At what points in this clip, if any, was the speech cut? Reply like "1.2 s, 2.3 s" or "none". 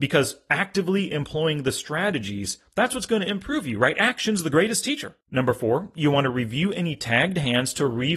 5.2 s